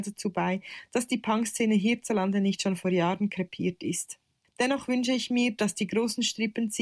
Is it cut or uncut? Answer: uncut